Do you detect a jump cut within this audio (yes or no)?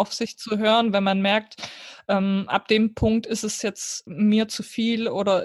yes